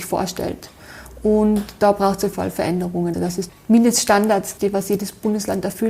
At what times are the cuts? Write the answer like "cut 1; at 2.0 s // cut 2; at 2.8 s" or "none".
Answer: cut 1; at 2.3 s // cut 2; at 3.1 s // cut 3; at 3.5 s // cut 4; at 4.6 s